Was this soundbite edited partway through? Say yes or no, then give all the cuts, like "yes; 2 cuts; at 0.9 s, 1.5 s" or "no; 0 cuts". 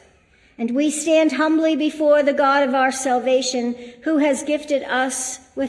no; 0 cuts